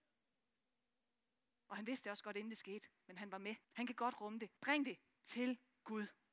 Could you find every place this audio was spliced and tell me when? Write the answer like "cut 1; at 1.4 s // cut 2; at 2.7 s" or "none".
cut 1; at 3.6 s // cut 2; at 4.6 s